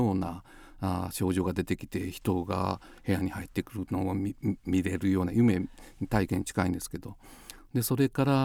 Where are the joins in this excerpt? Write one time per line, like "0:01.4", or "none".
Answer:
none